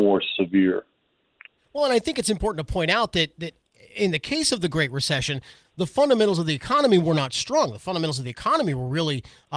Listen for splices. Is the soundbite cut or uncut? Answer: uncut